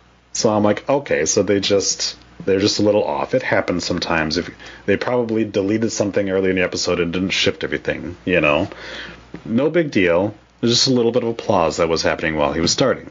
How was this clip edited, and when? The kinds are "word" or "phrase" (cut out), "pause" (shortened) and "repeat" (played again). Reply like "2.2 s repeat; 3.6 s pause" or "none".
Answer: none